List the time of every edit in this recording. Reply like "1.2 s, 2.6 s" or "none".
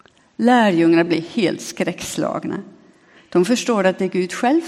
none